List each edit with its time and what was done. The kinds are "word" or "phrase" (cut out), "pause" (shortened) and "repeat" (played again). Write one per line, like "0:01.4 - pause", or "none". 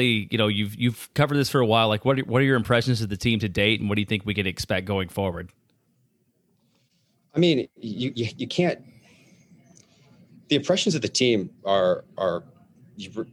none